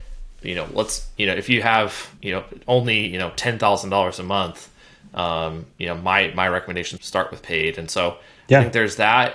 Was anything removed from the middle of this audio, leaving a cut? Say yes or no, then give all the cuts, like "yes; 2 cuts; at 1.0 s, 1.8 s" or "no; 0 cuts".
yes; 3 cuts; at 2.2 s, 5.7 s, 7.0 s